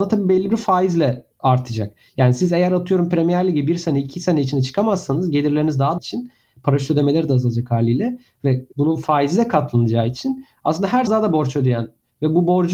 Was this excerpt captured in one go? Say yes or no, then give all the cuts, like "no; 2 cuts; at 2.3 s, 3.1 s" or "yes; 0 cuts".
no; 4 cuts; at 1.3 s, 6.0 s, 8.7 s, 11.1 s